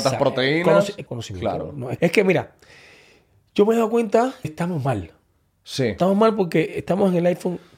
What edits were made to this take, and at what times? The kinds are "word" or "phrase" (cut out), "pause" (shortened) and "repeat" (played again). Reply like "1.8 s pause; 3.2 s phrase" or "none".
1.1 s word; 2.0 s word; 4.4 s word